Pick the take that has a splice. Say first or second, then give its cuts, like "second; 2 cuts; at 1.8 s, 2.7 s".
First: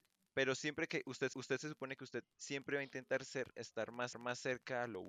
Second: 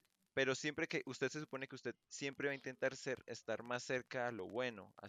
first; 2 cuts; at 1.3 s, 4.1 s